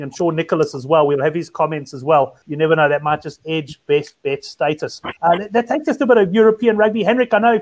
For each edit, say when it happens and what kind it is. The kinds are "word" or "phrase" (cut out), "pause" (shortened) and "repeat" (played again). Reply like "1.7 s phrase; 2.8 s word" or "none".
2.4 s pause; 5.2 s pause